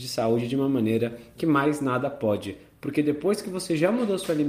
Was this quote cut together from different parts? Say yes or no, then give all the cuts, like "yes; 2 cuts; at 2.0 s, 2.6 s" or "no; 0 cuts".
no; 0 cuts